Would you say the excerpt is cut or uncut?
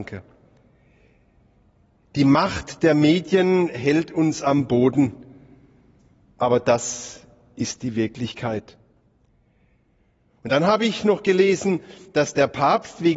uncut